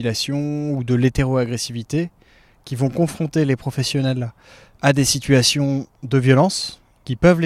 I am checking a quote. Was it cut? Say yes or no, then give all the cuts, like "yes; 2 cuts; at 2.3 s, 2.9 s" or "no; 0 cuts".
no; 0 cuts